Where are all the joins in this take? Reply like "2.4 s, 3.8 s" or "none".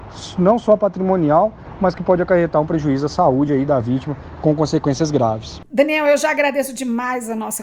none